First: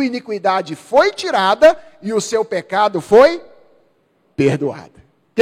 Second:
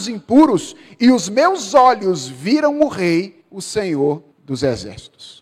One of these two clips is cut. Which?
second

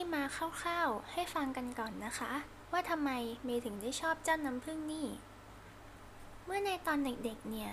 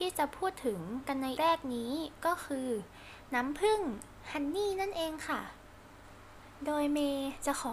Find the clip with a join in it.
second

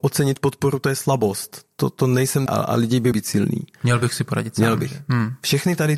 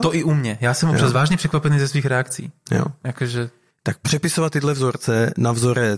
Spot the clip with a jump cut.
first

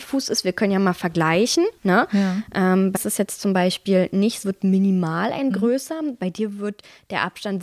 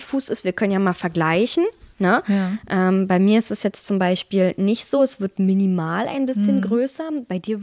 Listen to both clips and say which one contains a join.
first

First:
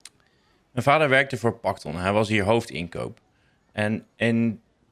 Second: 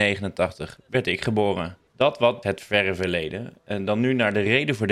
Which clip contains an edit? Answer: second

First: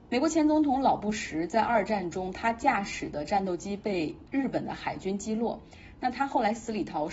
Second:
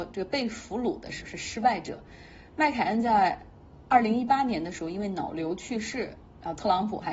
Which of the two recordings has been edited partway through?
second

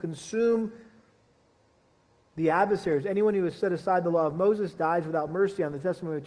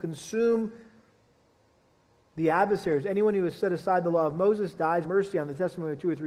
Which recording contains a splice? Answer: second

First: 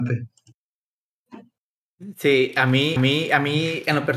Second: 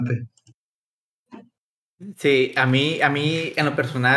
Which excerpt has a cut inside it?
first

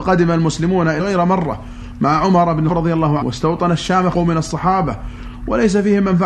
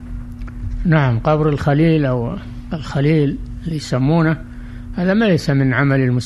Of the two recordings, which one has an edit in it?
first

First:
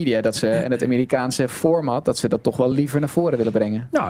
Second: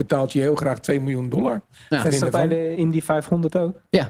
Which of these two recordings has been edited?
second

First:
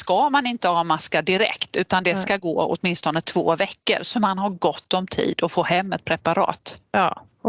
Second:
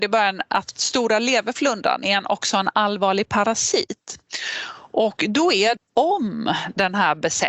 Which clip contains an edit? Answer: second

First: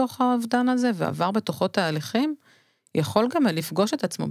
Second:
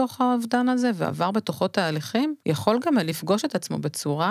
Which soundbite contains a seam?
second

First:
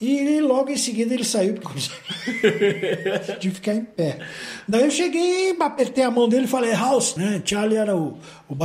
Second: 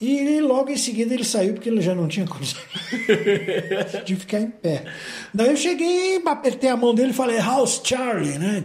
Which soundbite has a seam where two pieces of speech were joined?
first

